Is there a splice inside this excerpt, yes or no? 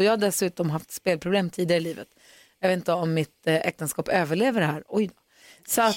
no